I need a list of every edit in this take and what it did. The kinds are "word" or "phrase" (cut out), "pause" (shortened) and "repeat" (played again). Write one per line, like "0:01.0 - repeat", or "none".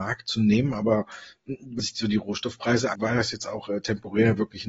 0:01.8 - word
0:02.9 - word